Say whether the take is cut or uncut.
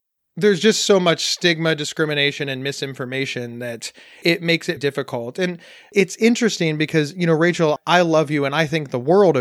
cut